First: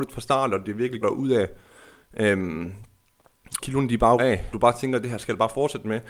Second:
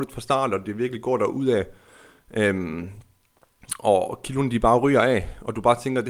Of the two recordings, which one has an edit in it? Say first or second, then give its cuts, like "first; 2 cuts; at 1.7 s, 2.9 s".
first; 4 cuts; at 1.0 s, 3.6 s, 4.2 s, 4.5 s